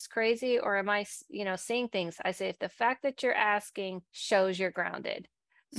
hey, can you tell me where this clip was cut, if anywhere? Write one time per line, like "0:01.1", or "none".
0:04.1